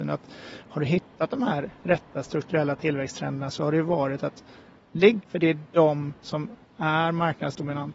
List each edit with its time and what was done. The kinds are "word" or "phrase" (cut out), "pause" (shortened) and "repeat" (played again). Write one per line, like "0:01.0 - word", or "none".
0:05.2 - word